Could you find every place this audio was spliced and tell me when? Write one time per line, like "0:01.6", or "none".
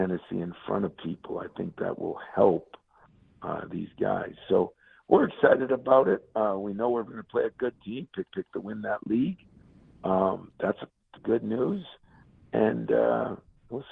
0:08.3
0:11.2